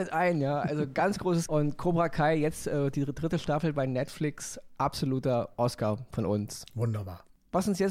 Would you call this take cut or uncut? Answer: cut